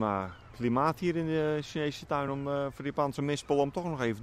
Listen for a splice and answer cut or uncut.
uncut